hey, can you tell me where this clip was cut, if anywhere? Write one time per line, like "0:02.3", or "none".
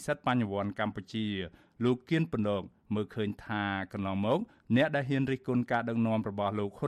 none